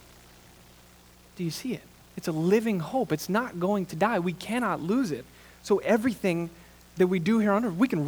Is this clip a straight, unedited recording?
yes; 0 cuts

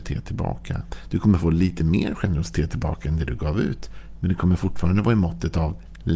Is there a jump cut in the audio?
no; 0 cuts

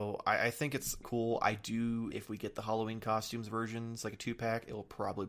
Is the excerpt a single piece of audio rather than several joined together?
no; 2 cuts; at 1.0 s, 2.1 s

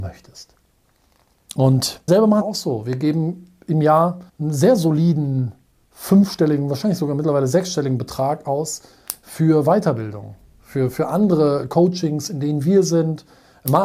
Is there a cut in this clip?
yes; 4 cuts; at 2.1 s, 2.4 s, 4.3 s, 10.5 s

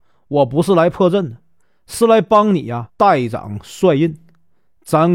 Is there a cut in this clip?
yes; 1 cut; at 2.9 s

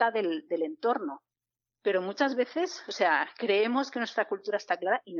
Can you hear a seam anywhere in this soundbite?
no; 0 cuts

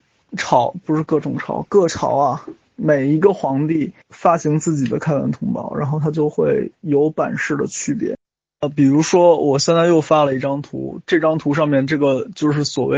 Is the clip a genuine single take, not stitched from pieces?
no; 1 cut; at 4.0 s

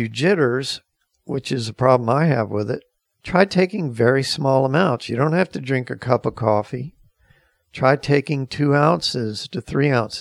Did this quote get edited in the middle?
no; 0 cuts

